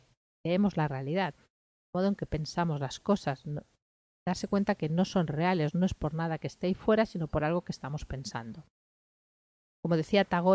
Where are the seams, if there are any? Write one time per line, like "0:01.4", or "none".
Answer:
none